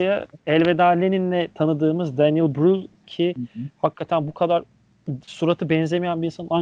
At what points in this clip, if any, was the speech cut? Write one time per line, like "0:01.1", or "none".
0:03.0
0:05.2